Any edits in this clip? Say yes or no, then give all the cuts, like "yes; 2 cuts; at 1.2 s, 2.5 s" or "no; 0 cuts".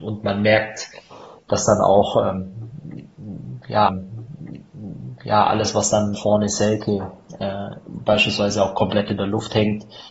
yes; 2 cuts; at 3.9 s, 6.1 s